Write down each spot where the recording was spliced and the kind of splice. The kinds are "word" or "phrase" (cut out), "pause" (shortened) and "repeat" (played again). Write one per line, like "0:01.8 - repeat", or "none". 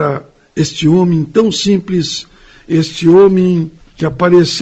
none

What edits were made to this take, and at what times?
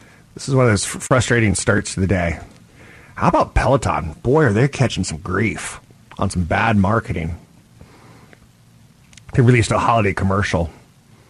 none

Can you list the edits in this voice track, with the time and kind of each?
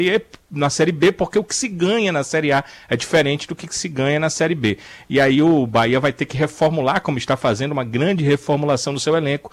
none

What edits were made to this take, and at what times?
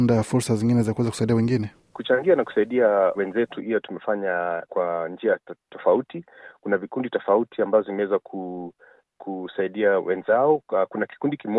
0:03.1 - word
0:04.7 - word

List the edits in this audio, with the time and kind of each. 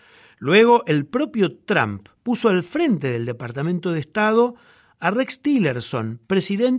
0:02.2 - pause

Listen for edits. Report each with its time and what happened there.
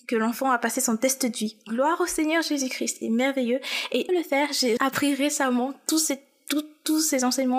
0:03.0 - word
0:04.1 - phrase
0:04.8 - word

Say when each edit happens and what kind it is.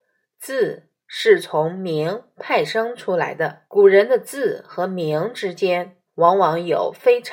0:03.7 - pause
0:06.1 - pause

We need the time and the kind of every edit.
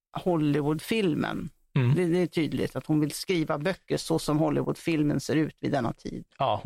none

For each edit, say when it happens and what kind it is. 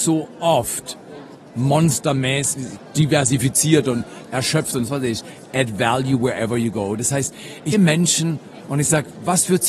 0:04.9 - word
0:07.7 - word

